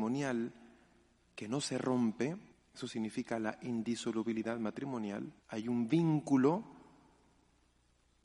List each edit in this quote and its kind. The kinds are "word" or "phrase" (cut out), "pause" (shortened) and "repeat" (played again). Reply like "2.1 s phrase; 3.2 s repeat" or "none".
2.5 s pause; 5.4 s pause